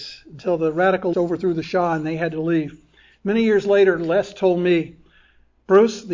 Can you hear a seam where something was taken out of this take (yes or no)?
yes